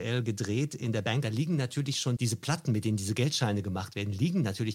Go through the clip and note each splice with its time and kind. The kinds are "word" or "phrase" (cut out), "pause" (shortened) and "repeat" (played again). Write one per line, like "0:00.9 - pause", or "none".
0:01.2 - phrase
0:02.2 - word